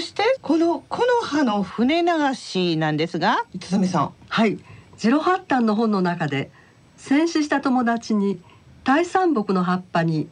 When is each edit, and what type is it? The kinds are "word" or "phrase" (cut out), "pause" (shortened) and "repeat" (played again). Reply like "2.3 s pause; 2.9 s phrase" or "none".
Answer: 4.8 s pause